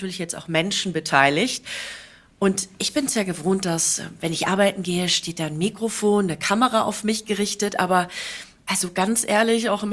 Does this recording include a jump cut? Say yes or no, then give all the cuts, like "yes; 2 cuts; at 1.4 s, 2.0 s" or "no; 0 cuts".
no; 0 cuts